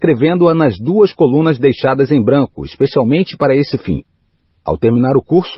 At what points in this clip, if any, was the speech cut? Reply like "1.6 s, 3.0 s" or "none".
none